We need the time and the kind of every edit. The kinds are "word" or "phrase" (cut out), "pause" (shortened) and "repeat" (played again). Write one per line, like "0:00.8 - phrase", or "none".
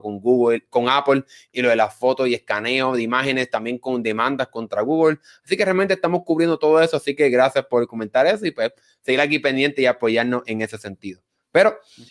none